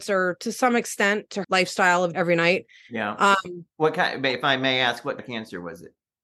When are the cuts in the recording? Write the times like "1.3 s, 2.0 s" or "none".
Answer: 1.4 s, 2.1 s, 3.7 s, 5.2 s